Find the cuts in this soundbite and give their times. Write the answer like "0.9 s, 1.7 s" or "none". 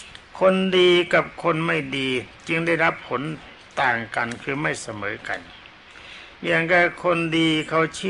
6.4 s

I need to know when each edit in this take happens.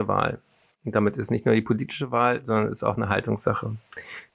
none

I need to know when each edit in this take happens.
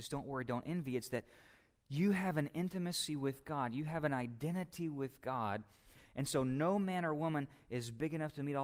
none

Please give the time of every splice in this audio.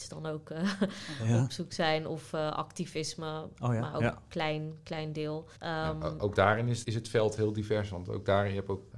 5.6 s, 6.8 s

